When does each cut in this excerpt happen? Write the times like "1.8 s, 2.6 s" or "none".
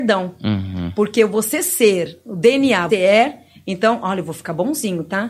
2.9 s